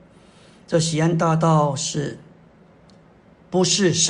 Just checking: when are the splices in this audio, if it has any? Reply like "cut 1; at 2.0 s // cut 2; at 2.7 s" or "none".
none